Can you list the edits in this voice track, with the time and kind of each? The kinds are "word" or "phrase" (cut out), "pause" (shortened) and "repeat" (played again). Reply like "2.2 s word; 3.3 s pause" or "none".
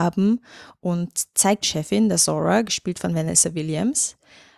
1.6 s phrase